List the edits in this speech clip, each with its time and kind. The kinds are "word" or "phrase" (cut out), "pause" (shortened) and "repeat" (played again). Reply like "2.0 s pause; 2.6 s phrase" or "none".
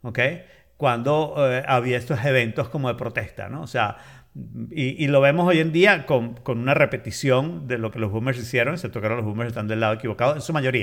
none